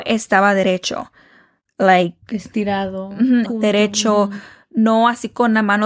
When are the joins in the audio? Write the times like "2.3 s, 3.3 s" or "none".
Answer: 3.4 s